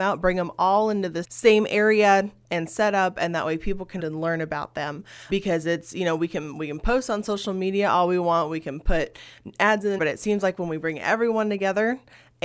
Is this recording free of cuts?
no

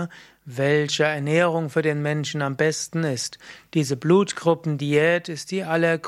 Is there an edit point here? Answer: no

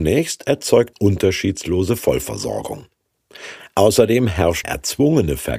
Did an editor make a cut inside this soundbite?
yes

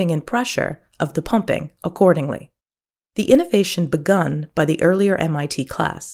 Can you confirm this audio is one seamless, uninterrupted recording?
yes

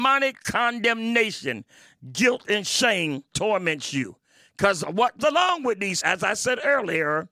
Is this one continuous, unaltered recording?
no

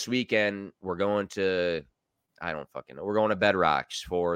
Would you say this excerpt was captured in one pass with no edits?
yes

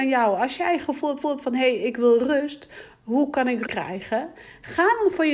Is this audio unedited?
no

